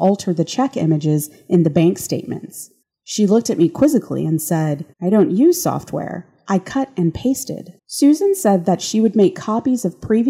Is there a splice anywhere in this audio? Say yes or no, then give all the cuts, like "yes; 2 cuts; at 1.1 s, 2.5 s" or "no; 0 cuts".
yes; 3 cuts; at 2.8 s, 4.9 s, 7.8 s